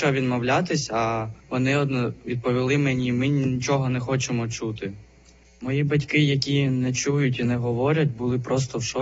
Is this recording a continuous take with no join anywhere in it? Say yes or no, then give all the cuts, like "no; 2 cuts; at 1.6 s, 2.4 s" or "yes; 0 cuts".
no; 1 cut; at 1.4 s